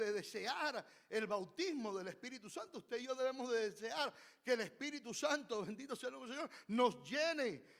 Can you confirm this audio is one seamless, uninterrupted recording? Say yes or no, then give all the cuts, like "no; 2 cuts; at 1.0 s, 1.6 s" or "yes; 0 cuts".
yes; 0 cuts